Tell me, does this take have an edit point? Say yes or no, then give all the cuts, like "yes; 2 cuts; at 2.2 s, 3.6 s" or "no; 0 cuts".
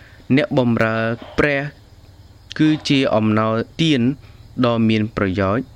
yes; 1 cut; at 3.7 s